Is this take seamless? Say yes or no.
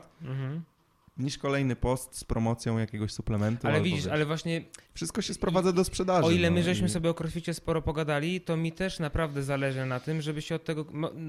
no